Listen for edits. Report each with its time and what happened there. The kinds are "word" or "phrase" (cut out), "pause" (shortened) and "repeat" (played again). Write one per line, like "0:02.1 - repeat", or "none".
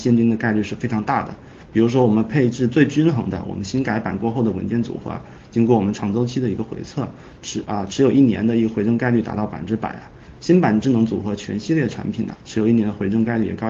0:12.3 - word